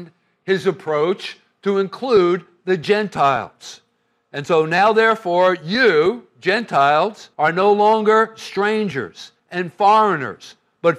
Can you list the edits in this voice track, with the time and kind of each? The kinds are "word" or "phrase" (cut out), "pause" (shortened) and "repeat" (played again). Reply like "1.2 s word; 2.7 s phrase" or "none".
7.3 s pause; 9.4 s pause